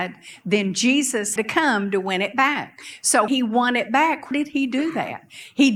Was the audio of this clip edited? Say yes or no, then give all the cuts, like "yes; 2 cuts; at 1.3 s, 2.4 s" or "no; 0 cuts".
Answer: yes; 3 cuts; at 1.4 s, 3.3 s, 4.3 s